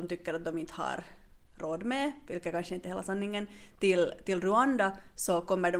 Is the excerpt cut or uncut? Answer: uncut